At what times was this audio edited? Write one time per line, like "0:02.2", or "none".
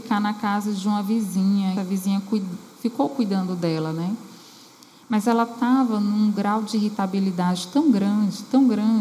0:01.8